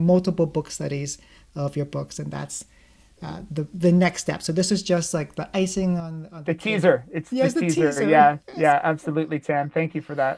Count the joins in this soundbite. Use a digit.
0